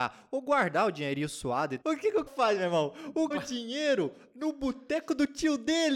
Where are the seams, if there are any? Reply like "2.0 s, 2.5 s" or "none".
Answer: 1.8 s, 2.3 s, 3.3 s